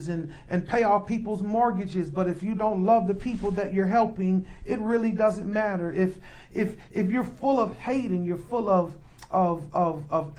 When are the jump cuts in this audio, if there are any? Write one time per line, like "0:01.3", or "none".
none